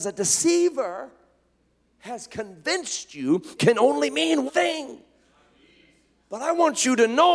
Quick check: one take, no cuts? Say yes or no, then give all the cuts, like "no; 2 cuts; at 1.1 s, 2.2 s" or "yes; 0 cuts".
no; 2 cuts; at 3.6 s, 4.5 s